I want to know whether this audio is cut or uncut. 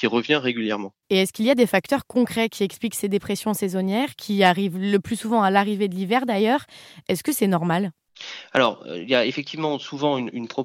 cut